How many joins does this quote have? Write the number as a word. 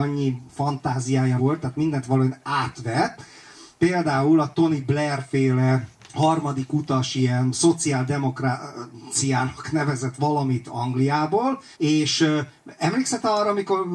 three